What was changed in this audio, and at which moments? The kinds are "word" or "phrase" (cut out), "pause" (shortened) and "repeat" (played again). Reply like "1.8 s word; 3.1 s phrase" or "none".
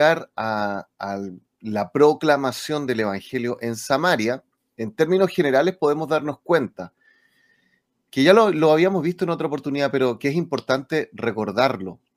none